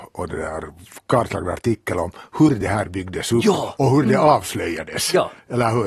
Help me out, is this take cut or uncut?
uncut